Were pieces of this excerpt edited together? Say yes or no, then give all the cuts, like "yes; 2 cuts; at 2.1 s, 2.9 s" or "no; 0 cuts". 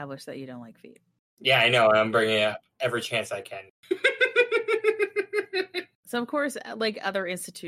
no; 0 cuts